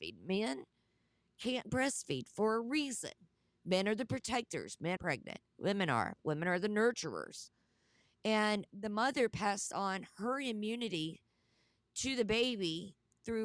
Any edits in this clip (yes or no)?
yes